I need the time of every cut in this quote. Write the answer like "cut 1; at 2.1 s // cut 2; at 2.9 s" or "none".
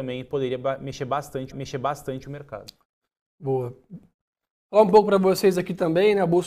cut 1; at 1.5 s